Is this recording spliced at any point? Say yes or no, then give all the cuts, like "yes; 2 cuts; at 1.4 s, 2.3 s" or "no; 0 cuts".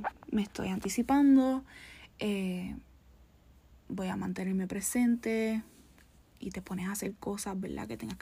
no; 0 cuts